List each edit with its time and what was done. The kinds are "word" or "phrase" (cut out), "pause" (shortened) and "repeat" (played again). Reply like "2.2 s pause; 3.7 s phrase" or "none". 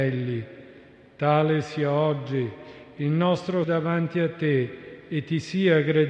3.6 s word